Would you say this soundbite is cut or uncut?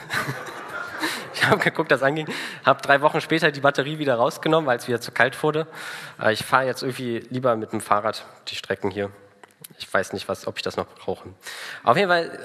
uncut